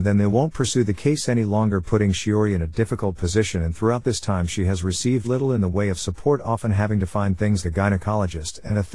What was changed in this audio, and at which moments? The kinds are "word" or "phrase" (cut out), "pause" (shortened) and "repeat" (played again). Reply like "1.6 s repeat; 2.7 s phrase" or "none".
5.2 s word; 7.6 s word